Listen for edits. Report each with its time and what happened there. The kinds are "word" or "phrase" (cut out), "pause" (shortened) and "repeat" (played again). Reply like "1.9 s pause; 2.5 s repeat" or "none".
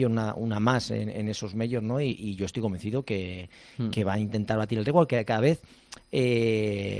none